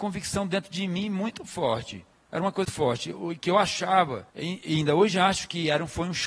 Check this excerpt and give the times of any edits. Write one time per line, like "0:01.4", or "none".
0:02.1
0:02.6
0:04.3